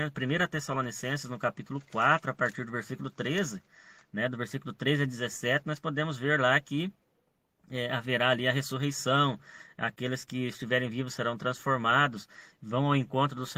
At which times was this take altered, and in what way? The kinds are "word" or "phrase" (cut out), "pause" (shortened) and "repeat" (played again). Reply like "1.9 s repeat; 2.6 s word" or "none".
none